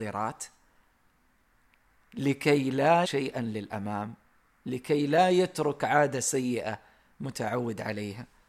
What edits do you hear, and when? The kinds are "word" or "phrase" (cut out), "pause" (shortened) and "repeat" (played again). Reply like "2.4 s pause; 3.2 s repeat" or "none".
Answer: 3.0 s word